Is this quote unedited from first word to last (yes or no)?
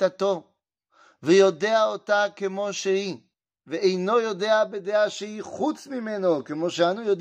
yes